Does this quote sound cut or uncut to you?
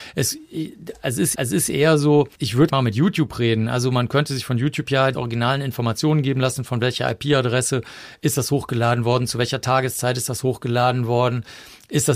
cut